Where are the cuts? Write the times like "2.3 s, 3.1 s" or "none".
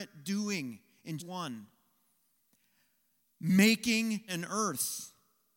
1.2 s, 4.3 s